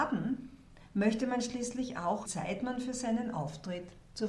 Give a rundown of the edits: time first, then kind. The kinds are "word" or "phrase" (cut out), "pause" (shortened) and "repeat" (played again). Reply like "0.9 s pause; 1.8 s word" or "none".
2.2 s phrase